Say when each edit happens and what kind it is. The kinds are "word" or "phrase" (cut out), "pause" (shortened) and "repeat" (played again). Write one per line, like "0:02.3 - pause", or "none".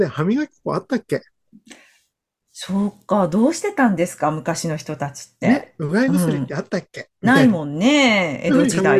none